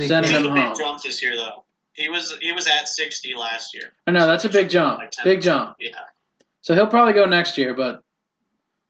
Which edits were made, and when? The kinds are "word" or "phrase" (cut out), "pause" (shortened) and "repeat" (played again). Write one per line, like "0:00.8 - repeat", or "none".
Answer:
none